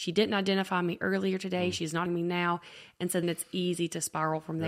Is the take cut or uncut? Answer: cut